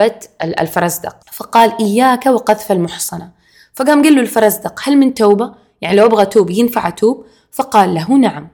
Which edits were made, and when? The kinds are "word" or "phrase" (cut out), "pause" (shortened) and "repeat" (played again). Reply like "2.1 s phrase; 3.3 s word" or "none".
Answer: 1.2 s pause